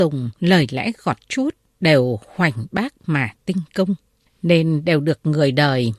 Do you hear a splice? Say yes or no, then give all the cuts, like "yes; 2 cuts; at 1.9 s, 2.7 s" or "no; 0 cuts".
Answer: no; 0 cuts